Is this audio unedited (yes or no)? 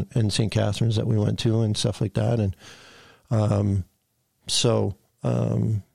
yes